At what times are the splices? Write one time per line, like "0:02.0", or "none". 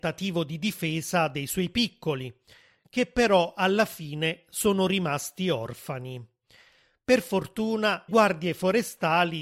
0:08.1